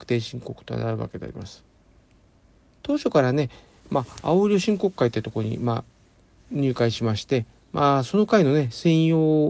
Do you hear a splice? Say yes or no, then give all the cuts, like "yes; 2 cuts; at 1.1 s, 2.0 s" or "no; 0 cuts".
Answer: no; 0 cuts